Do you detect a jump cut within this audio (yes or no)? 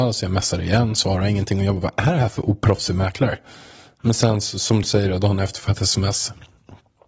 no